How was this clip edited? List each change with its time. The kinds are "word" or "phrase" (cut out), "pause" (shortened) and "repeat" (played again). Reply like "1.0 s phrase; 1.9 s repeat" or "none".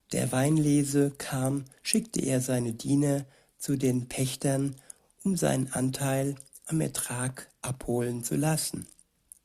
none